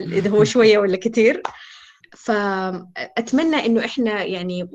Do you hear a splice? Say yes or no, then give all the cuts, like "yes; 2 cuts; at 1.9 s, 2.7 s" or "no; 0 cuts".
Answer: yes; 1 cut; at 2.0 s